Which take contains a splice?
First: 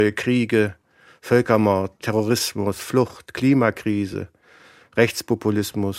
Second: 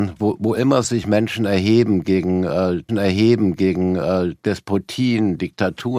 second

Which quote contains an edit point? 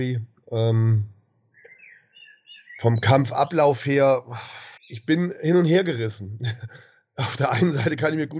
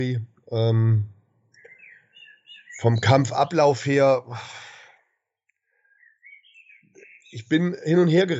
first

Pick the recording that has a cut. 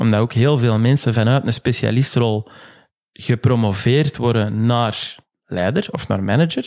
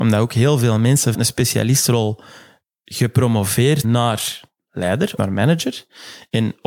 second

